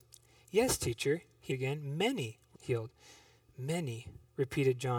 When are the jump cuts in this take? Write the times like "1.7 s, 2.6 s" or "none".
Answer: 1.5 s, 2.5 s